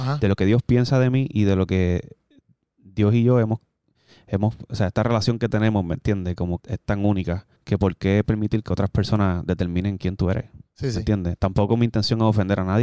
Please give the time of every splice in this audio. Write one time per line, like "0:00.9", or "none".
0:06.6
0:07.5